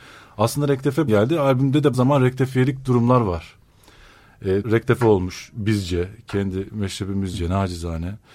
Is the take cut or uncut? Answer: cut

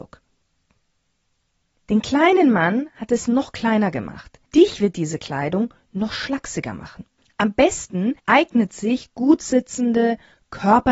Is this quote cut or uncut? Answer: cut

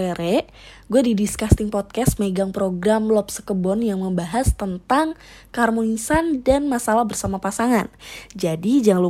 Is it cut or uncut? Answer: uncut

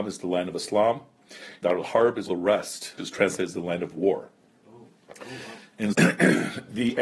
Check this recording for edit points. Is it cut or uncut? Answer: cut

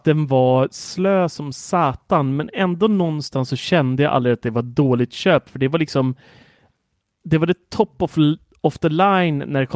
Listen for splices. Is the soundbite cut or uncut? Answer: uncut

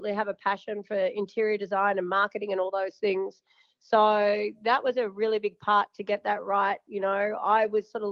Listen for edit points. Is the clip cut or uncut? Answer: uncut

